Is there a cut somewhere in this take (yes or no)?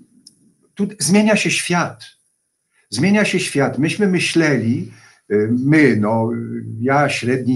no